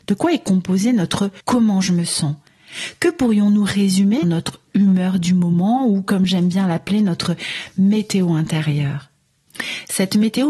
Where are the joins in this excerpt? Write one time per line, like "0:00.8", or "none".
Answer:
0:01.4
0:04.2